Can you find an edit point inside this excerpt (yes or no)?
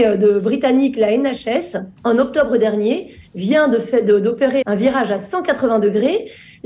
yes